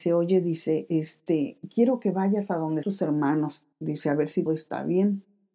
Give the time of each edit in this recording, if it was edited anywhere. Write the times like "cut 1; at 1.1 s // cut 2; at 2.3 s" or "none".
cut 1; at 2.8 s // cut 2; at 3.7 s // cut 3; at 4.5 s